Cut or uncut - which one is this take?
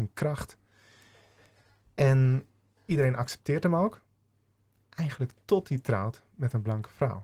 uncut